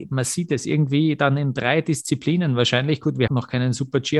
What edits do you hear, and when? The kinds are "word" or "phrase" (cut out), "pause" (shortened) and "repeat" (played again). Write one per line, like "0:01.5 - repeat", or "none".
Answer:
0:03.3 - word